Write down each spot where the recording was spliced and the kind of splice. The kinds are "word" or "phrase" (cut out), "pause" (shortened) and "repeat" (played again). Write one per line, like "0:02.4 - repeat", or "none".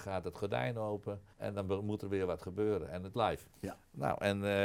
0:01.3 - pause
0:03.1 - word
0:03.5 - pause

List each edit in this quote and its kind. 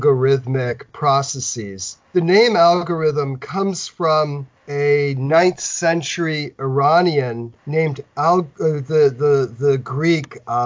0:04.6 - pause
0:07.6 - pause

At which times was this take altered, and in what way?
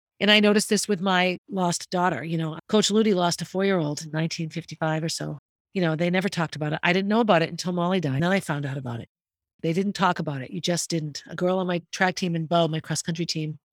none

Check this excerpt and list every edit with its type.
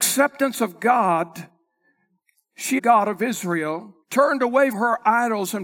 0:02.8 - phrase
0:04.0 - pause
0:04.7 - word

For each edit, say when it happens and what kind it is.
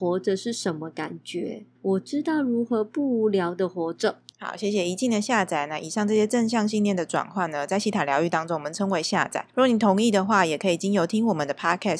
0:01.7 - pause
0:04.3 - pause
0:09.5 - pause

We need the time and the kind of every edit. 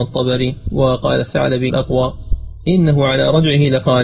0:01.7 - word

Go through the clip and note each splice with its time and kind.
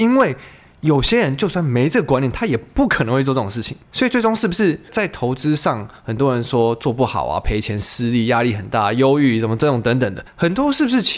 0:03.8 - pause
0:10.3 - pause

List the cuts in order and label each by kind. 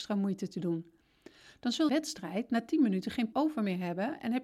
0:01.9 - phrase
0:03.3 - word

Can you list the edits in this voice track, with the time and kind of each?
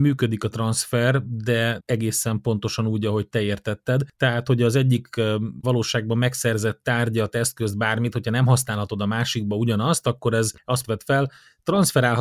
0:01.8 - word
0:05.6 - word
0:10.8 - phrase

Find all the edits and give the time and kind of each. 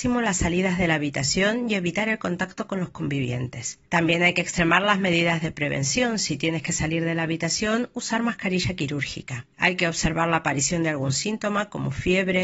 0:03.8 - pause
0:09.5 - pause

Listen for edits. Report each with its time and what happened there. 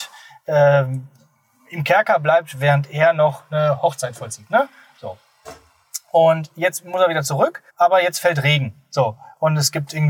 0:07.7 - pause

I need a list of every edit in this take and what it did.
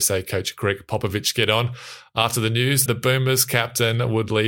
0:02.9 - word

